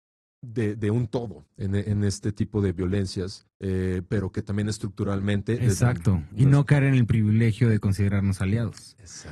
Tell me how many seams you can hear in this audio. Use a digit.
2